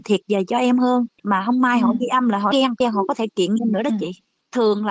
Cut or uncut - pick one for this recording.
cut